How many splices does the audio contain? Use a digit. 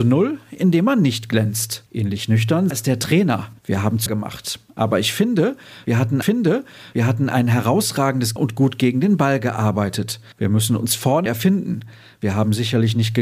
8